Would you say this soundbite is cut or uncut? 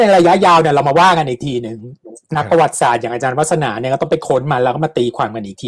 cut